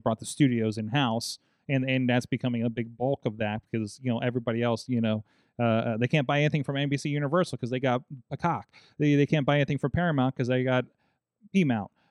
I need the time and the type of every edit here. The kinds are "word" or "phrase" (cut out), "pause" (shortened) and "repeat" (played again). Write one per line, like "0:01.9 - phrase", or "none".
none